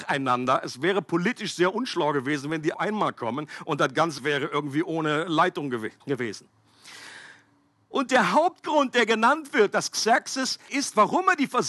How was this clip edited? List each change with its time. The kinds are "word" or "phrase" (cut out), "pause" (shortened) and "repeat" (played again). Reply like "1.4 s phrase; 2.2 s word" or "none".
2.7 s phrase; 4.2 s word; 6.0 s pause; 10.7 s word